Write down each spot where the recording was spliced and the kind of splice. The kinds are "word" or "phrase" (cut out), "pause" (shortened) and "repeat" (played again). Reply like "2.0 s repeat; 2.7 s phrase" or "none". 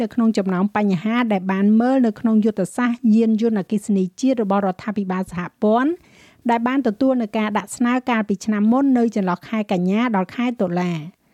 none